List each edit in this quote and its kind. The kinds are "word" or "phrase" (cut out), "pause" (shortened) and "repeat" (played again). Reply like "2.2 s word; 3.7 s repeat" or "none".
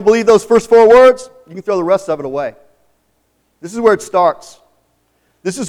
none